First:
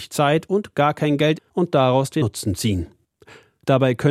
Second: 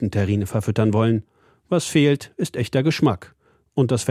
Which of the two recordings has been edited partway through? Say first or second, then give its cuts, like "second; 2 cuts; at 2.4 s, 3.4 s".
first; 2 cuts; at 1.4 s, 2.2 s